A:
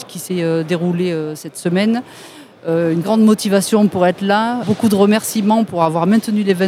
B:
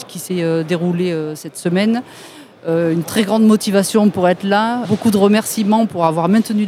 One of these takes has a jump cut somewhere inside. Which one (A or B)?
A